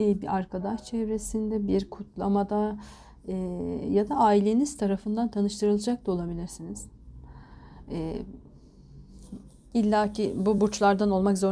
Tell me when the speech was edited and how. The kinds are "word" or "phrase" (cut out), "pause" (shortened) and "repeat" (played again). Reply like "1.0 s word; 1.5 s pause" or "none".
none